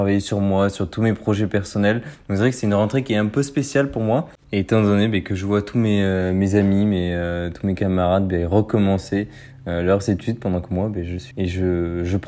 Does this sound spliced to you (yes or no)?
yes